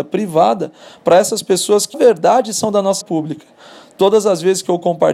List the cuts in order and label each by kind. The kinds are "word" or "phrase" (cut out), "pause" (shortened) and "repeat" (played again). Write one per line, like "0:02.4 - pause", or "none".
0:01.9 - word
0:03.0 - word

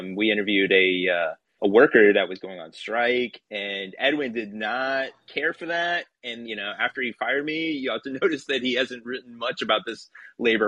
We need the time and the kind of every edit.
0:01.6 - word
0:03.4 - pause
0:06.4 - word

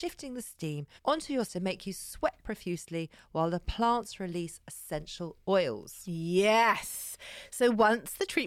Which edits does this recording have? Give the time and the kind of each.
0:01.0 - pause
0:01.5 - word

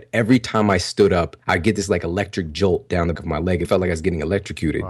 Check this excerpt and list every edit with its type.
0:01.4 - pause
0:03.1 - word
0:03.6 - word

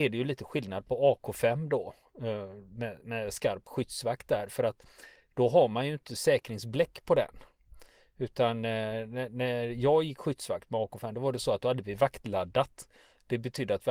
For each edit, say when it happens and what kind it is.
none

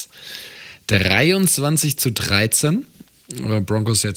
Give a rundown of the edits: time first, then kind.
none

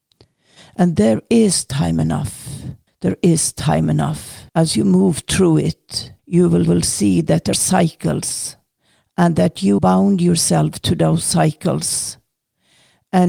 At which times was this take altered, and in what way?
0:02.9 - pause
0:04.5 - pause
0:06.2 - pause
0:06.7 - repeat
0:07.5 - word
0:09.8 - word

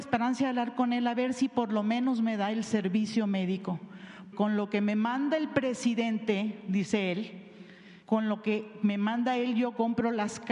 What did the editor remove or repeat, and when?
0:04.3 - word
0:08.0 - pause

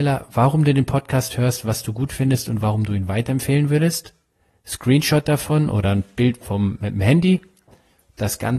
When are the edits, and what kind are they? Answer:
none

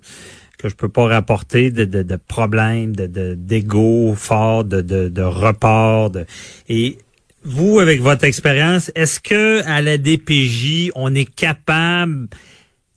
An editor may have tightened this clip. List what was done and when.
none

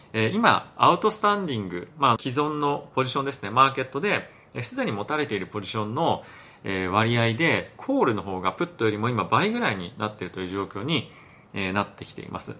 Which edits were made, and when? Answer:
0:02.2 - word

